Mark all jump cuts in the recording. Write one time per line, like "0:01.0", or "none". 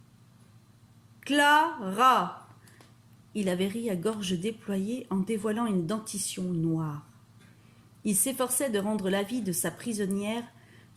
none